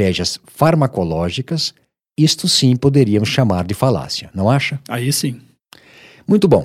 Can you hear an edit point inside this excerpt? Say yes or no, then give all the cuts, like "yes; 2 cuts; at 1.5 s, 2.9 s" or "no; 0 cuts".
no; 0 cuts